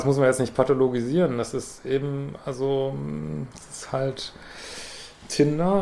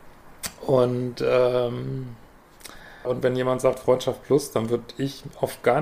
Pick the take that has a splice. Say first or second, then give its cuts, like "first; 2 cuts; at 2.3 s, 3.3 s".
second; 1 cut; at 3.0 s